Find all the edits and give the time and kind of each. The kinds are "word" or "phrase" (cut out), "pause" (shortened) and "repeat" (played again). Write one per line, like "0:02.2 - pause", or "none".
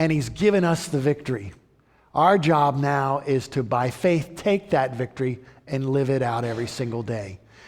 none